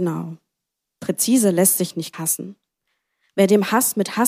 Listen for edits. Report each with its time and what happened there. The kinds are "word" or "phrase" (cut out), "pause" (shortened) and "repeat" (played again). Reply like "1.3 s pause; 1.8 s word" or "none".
2.1 s word